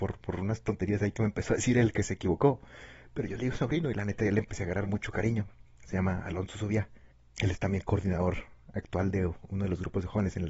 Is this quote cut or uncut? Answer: uncut